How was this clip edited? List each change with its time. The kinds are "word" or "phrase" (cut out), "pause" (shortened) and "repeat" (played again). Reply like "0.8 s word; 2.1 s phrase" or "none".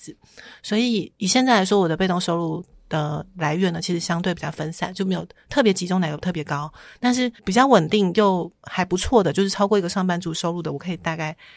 7.4 s pause